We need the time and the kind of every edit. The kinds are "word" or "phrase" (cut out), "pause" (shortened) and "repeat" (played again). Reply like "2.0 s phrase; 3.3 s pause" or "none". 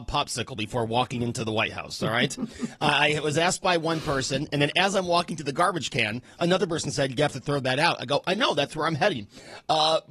none